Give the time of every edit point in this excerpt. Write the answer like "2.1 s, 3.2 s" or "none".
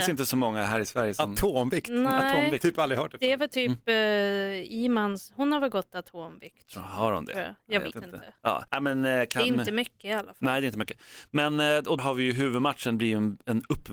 7.9 s, 8.7 s, 12.0 s